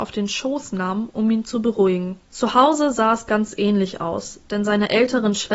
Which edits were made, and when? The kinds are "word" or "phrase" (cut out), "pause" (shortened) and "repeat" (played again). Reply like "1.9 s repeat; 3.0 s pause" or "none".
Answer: 2.3 s pause